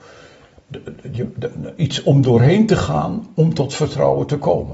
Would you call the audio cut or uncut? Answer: uncut